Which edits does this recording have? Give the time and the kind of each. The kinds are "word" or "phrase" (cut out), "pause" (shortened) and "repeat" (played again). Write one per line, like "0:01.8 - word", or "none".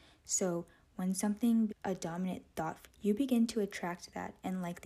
0:01.7 - word
0:02.8 - word